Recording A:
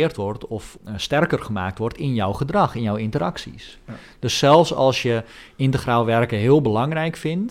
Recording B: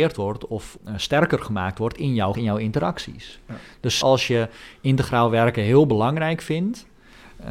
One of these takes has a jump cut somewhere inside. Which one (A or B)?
B